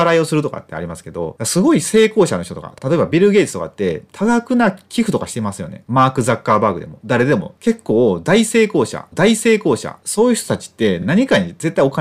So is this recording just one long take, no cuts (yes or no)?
no